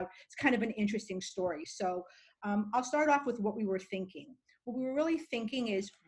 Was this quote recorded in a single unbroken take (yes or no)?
yes